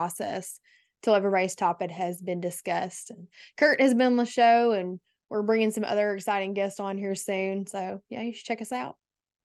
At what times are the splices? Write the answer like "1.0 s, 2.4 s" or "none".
none